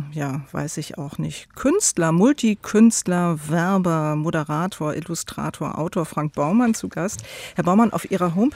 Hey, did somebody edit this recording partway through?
no; 0 cuts

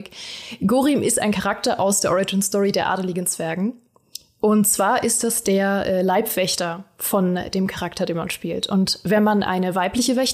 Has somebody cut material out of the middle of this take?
no; 0 cuts

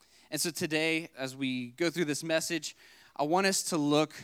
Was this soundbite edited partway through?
yes; 1 cut; at 1.1 s

